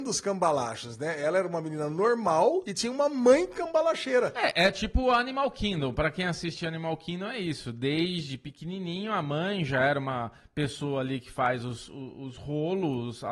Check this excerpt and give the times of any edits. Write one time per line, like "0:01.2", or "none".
none